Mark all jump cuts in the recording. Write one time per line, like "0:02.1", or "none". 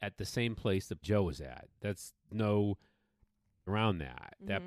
0:01.0
0:02.3
0:03.7